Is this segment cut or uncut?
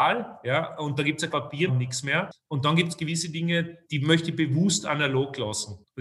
cut